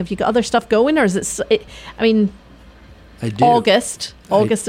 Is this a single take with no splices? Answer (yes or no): yes